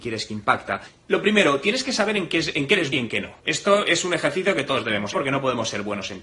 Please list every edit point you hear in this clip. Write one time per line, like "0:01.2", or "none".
0:02.9
0:03.4
0:05.1